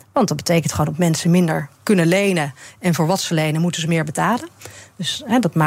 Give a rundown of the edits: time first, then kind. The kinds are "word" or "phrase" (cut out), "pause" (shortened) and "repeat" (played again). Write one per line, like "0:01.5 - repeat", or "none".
none